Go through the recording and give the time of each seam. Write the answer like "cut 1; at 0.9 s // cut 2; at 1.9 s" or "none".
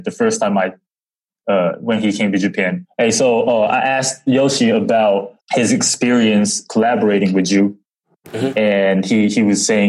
none